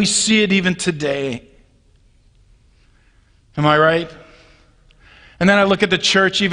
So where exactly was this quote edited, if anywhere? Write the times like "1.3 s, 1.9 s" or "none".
none